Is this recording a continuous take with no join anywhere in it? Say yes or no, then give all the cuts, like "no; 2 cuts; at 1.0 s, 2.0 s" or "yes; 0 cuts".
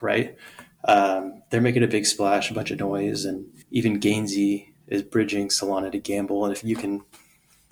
no; 2 cuts; at 3.6 s, 4.8 s